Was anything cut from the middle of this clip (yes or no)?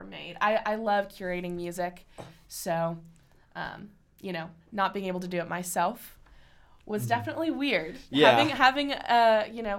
no